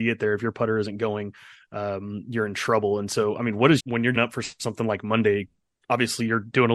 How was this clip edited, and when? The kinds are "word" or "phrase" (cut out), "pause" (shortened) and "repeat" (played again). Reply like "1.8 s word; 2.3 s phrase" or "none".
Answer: 3.8 s word; 4.2 s word